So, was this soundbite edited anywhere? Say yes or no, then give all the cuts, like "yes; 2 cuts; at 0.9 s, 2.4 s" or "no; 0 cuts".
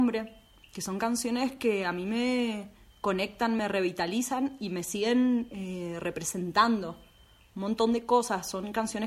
no; 0 cuts